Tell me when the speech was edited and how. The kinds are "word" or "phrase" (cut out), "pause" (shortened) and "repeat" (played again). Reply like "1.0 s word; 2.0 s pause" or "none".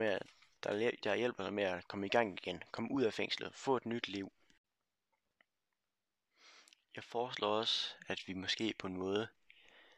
none